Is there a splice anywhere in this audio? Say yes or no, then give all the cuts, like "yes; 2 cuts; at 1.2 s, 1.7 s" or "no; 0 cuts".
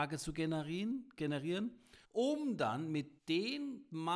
yes; 2 cuts; at 2.0 s, 3.2 s